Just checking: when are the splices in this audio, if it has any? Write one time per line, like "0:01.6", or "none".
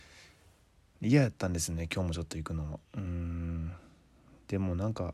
0:02.8